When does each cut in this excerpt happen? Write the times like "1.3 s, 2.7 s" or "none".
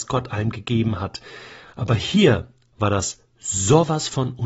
none